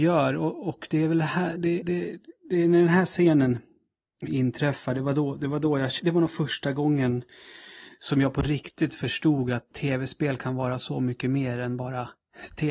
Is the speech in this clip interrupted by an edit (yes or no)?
yes